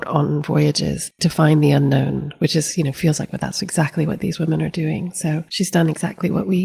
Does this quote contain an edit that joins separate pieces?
no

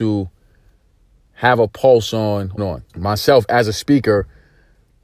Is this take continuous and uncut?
no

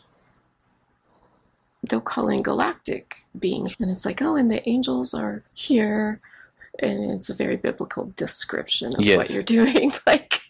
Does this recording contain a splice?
yes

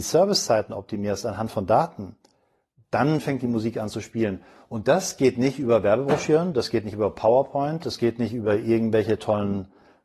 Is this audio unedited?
yes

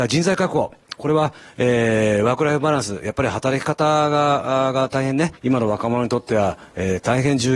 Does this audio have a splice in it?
yes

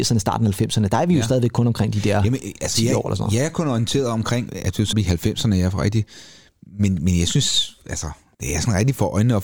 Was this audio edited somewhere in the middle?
yes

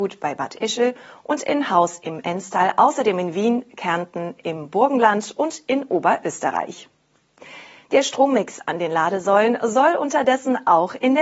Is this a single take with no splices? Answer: yes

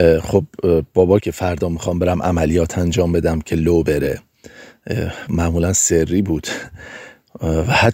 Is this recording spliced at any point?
yes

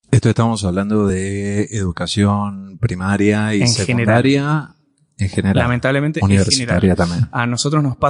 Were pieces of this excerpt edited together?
no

